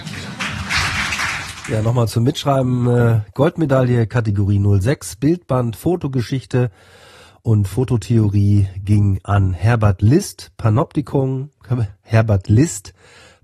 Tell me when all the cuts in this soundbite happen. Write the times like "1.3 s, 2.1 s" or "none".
none